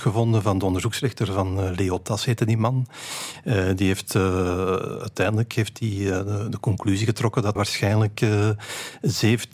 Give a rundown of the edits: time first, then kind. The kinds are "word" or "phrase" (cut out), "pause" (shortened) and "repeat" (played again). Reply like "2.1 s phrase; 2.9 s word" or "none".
7.6 s word

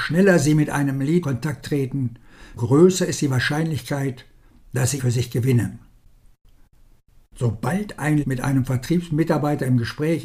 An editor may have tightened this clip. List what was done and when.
1.2 s word; 2.6 s word; 5.0 s word; 8.2 s word

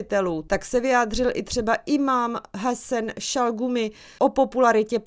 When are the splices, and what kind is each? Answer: none

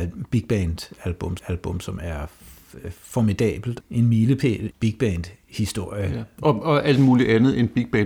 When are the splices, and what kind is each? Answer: 1.4 s repeat; 3.8 s word; 4.7 s word

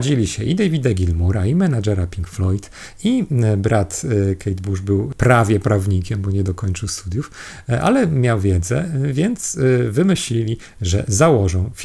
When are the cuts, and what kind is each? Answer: none

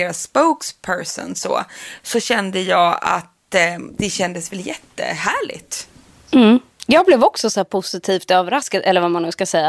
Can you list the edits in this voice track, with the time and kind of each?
none

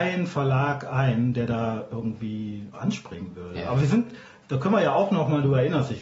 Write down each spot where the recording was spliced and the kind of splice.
2.7 s phrase

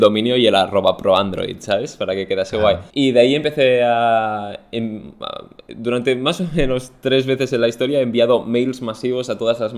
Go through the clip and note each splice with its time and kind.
2.9 s pause

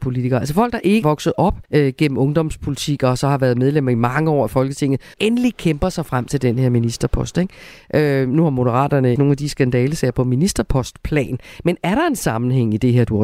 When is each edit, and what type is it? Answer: 1.0 s word; 1.7 s pause; 5.1 s phrase; 9.2 s phrase

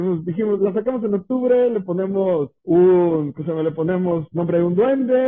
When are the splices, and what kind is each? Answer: 2.6 s pause

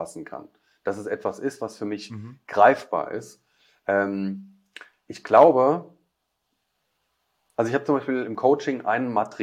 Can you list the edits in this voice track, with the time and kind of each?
none

